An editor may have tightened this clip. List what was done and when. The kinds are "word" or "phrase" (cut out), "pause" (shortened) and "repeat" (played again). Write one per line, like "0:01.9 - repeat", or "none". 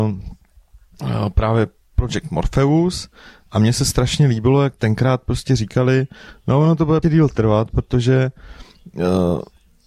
0:04.8 - word
0:07.0 - word